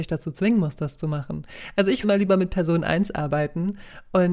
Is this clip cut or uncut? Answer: cut